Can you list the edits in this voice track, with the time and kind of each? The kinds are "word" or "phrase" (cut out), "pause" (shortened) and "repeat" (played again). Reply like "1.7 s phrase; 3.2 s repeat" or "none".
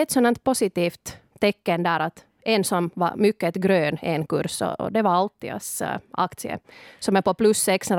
none